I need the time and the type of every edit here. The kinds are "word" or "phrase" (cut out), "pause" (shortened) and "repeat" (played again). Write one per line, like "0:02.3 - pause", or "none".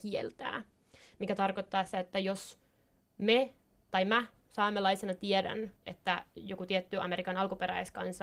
0:05.8 - pause